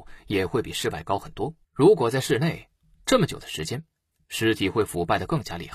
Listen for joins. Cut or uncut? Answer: cut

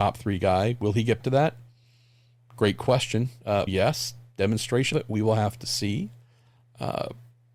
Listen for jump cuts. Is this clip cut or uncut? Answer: cut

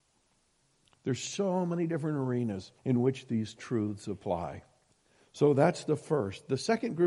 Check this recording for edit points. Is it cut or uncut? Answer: cut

